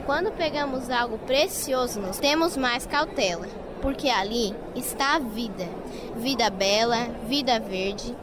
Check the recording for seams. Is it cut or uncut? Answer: cut